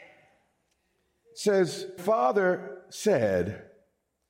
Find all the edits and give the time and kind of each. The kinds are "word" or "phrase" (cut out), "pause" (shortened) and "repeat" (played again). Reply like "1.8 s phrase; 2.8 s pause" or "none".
2.0 s word